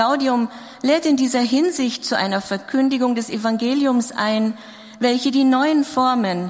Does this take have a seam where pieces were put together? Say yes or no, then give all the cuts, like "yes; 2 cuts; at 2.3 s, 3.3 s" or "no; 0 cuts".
no; 0 cuts